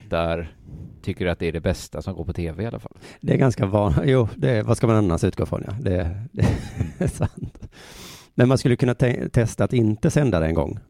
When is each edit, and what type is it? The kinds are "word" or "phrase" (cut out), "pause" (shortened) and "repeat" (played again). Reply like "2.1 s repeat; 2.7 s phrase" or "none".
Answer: none